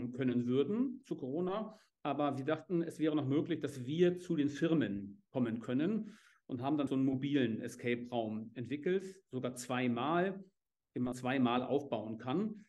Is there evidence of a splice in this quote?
yes; 2 cuts; at 6.9 s, 11.1 s

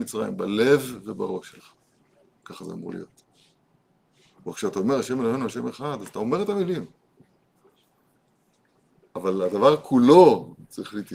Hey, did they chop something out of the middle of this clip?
no; 0 cuts

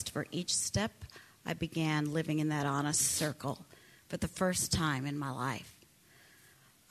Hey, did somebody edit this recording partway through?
no; 0 cuts

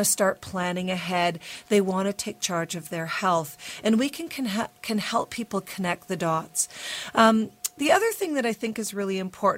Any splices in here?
no; 0 cuts

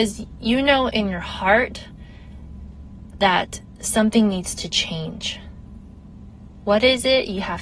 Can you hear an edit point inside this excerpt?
no; 0 cuts

